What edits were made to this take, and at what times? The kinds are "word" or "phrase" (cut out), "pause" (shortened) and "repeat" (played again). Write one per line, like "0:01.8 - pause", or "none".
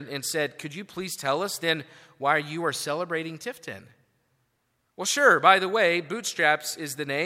none